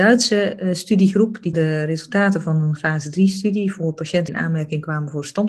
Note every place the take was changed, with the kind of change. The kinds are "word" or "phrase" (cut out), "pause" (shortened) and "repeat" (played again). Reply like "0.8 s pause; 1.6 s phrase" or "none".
1.5 s word; 2.8 s word; 4.3 s word